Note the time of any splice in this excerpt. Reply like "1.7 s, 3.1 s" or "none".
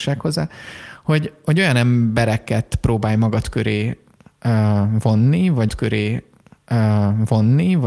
5.7 s